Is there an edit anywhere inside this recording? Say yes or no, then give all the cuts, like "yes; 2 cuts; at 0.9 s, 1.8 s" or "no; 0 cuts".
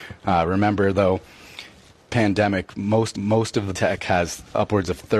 yes; 3 cuts; at 2.1 s, 3.1 s, 3.7 s